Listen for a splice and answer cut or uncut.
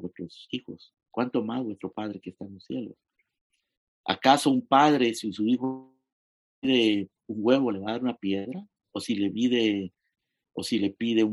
uncut